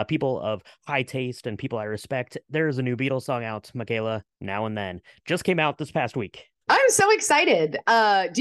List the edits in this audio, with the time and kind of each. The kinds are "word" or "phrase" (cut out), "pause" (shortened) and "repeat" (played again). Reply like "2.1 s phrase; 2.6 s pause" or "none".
4.3 s pause; 6.6 s pause